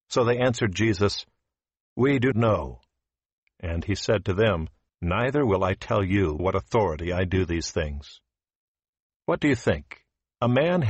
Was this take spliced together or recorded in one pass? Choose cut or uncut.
cut